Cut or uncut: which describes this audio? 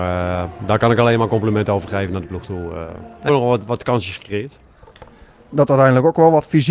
cut